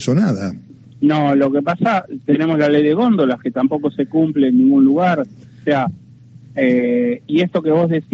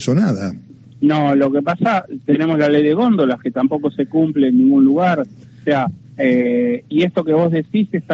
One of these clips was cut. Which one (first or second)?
second